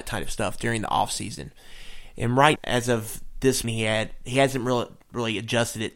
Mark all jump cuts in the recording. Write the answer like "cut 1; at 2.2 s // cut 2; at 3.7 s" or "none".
cut 1; at 2.6 s // cut 2; at 3.6 s